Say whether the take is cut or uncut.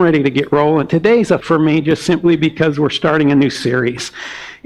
cut